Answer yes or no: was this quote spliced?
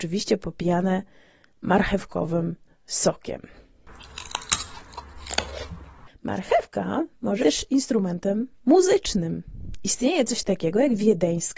yes